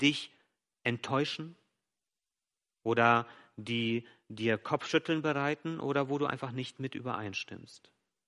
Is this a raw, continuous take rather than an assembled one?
yes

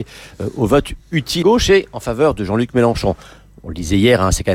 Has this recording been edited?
yes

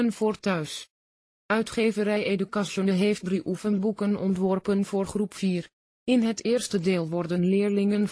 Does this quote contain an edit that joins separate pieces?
no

